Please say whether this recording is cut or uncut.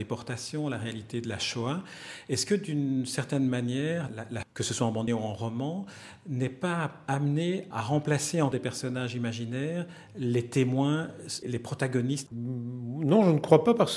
cut